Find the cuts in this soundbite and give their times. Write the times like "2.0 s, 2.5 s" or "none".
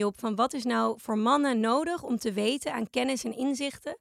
none

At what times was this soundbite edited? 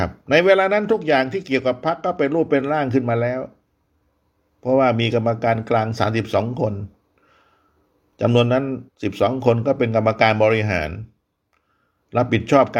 8.9 s

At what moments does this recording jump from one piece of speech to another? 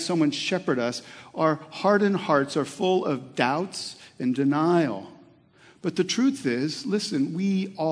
none

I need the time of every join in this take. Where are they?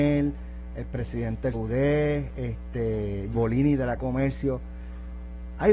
1.5 s, 3.3 s, 4.0 s

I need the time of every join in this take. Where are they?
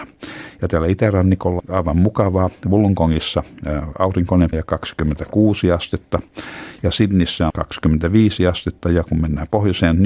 1.6 s, 4.5 s, 7.5 s

